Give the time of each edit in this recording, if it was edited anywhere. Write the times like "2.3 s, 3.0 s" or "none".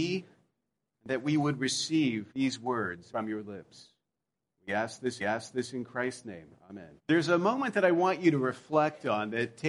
2.3 s, 3.1 s, 5.2 s, 7.0 s